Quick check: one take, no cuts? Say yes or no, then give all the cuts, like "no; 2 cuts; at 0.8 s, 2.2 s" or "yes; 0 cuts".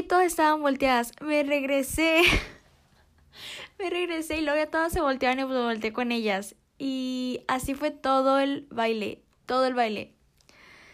yes; 0 cuts